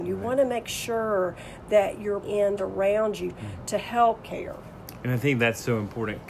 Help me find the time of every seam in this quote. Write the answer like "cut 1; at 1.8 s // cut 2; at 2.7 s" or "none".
cut 1; at 2.2 s // cut 2; at 2.6 s // cut 3; at 3.3 s // cut 4; at 4.2 s